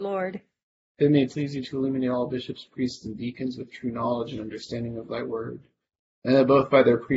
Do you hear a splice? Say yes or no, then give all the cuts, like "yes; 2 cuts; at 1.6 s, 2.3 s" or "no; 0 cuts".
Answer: no; 0 cuts